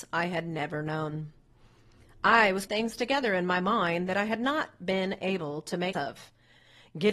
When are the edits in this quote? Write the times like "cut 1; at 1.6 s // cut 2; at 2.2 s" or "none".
cut 1; at 2.7 s // cut 2; at 5.9 s